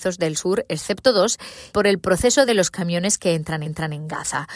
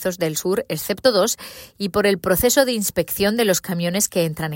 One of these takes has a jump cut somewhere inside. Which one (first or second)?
first